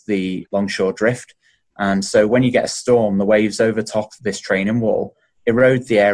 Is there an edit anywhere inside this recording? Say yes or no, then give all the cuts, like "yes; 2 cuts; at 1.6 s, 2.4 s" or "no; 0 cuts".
no; 0 cuts